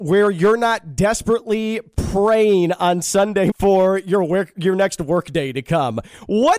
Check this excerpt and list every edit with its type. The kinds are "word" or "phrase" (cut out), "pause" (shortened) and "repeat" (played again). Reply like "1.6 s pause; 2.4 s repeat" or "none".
3.5 s word